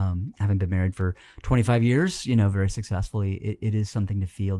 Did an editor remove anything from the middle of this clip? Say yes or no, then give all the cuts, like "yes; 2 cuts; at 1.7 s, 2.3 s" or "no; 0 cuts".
no; 0 cuts